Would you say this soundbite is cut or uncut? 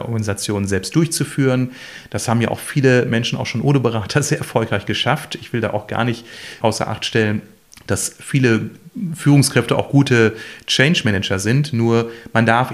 cut